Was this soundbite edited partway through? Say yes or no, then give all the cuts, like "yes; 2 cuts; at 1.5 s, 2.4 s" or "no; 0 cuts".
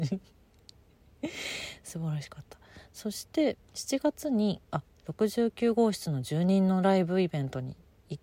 yes; 2 cuts; at 3.6 s, 4.6 s